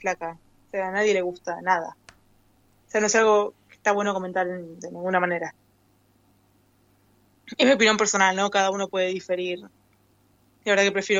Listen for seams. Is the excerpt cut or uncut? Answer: uncut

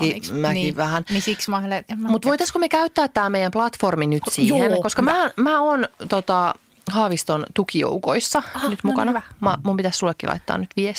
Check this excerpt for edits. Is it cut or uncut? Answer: uncut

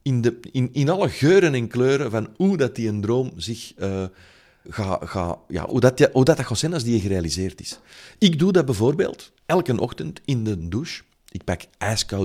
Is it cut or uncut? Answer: cut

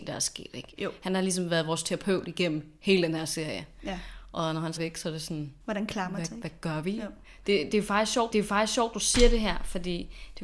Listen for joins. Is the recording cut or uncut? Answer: cut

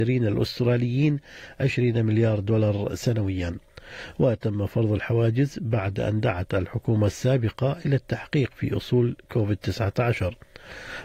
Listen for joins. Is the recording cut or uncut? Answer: uncut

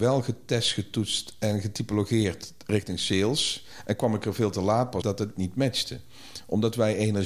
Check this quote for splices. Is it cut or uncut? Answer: cut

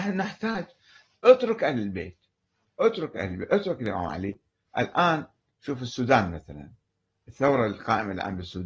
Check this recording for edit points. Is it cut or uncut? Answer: uncut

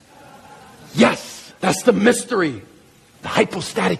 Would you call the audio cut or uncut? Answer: cut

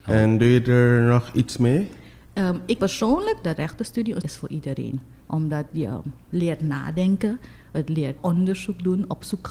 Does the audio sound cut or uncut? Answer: cut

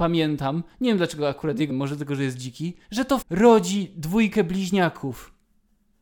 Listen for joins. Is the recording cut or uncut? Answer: cut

